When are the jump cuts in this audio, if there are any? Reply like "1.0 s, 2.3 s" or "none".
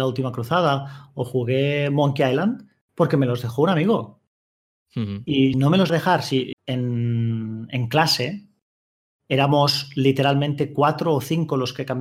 5.5 s, 5.9 s, 6.5 s